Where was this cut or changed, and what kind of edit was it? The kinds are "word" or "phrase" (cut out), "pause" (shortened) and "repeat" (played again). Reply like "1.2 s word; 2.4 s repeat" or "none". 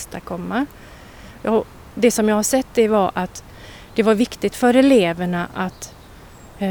none